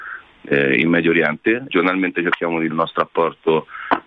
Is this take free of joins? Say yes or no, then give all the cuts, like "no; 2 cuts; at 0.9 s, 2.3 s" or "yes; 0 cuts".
no; 2 cuts; at 1.7 s, 2.7 s